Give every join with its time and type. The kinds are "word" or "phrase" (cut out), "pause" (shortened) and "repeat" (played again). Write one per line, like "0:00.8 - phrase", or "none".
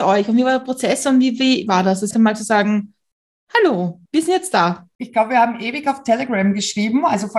0:01.7 - phrase
0:02.1 - word
0:04.1 - pause